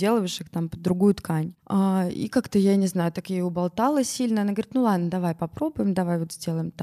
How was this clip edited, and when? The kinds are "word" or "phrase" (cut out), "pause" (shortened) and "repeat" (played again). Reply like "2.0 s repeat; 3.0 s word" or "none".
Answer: 1.6 s pause

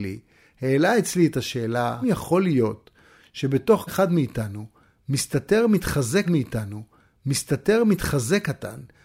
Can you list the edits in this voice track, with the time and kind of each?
2.0 s word; 3.9 s word; 6.2 s repeat

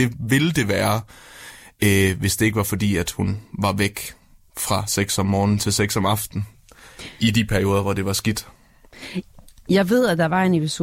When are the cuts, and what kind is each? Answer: none

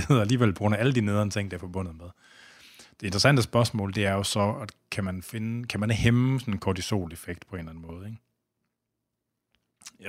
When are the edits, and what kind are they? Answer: none

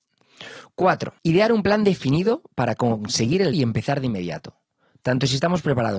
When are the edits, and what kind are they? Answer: 1.2 s pause; 3.5 s word

